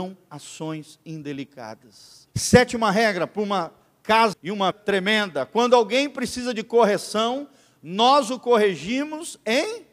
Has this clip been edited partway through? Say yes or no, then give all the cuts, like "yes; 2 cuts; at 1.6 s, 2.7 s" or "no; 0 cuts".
yes; 3 cuts; at 2.3 s, 4.3 s, 4.7 s